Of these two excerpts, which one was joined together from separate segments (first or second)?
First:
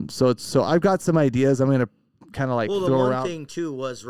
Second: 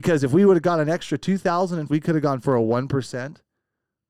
second